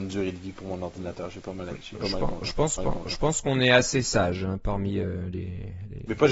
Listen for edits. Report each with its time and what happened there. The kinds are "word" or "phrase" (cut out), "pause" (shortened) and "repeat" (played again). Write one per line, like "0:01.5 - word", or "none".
0:02.8 - repeat